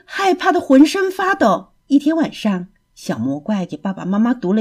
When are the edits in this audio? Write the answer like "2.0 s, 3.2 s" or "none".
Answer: 1.8 s